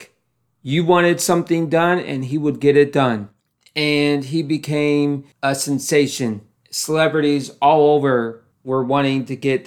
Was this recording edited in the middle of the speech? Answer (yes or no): no